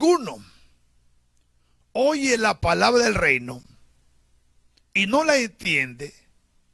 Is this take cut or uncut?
uncut